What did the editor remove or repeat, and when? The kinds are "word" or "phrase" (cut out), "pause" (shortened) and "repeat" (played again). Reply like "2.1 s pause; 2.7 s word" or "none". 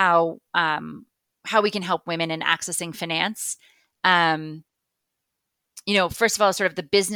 none